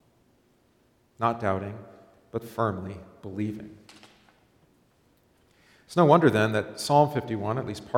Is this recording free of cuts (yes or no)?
yes